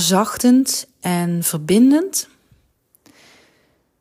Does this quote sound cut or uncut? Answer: uncut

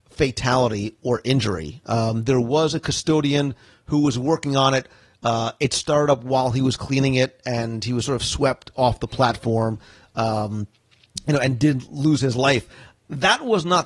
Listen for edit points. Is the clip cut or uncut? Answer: uncut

